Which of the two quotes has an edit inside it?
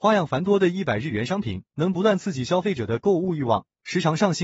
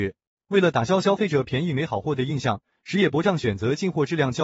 first; 1 cut; at 1.7 s

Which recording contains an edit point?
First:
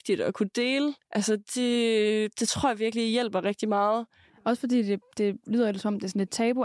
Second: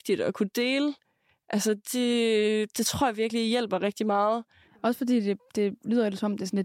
first; 1 cut; at 1.0 s

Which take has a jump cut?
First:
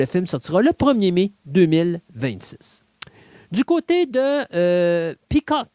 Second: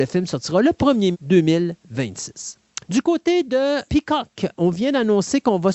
second; 3 cuts; at 1.1 s, 2.8 s, 3.9 s

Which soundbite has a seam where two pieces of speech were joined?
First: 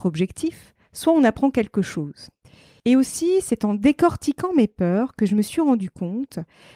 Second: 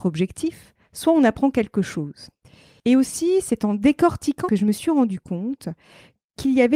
second; 1 cut; at 4.5 s

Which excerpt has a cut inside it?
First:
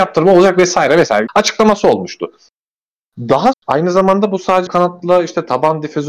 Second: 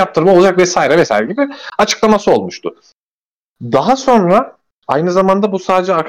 first; 3 cuts; at 1.3 s, 3.5 s, 4.7 s

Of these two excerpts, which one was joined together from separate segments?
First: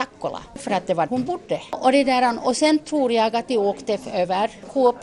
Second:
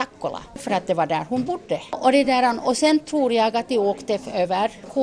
first; 1 cut; at 1.1 s

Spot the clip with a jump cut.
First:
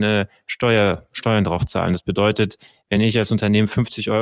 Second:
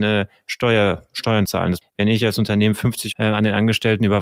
second; 3 cuts; at 1.5 s, 1.8 s, 3.1 s

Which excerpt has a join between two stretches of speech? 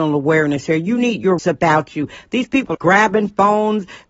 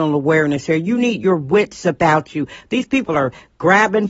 first; 2 cuts; at 1.4 s, 2.7 s

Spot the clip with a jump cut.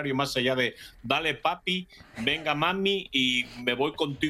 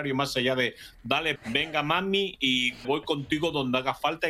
second; 2 cuts; at 1.4 s, 2.8 s

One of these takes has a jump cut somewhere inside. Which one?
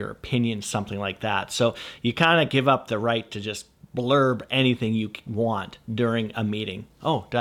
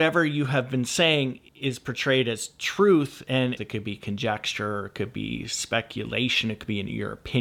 second; 2 cuts; at 1.5 s, 3.6 s

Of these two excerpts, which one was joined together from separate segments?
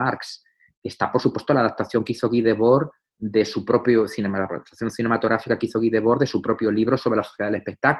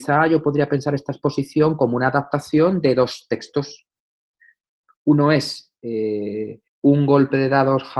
second; 1 cut; at 6.7 s

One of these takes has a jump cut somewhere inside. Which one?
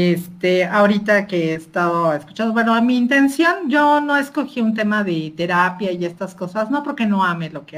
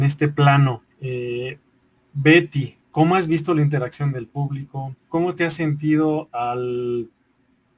second; 3 cuts; at 0.9 s, 2.8 s, 5.0 s

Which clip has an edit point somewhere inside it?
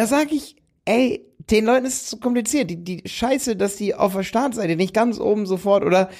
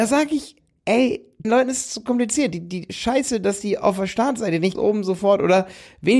second; 2 cuts; at 1.4 s, 4.7 s

